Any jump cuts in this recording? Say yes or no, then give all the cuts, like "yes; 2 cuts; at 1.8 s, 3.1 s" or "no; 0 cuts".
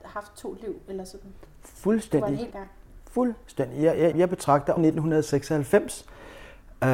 yes; 3 cuts; at 2.5 s, 4.1 s, 4.8 s